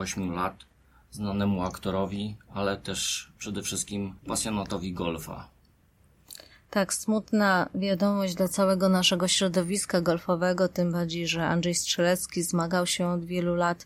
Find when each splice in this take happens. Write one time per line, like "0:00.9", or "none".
0:04.2